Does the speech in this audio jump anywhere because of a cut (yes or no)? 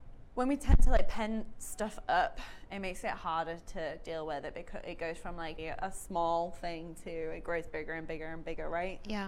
yes